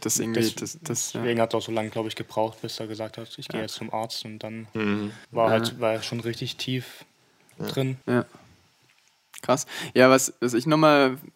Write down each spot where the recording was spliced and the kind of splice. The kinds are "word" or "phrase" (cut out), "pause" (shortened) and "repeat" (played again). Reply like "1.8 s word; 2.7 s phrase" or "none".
5.2 s pause; 8.0 s pause